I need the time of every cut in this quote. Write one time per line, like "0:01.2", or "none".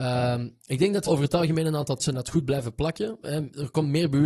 0:01.1
0:02.0